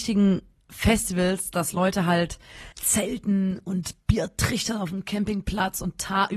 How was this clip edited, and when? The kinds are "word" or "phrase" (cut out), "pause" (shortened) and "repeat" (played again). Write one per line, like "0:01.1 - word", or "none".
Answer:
0:02.7 - pause